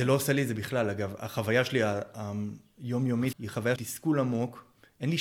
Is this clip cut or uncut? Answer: cut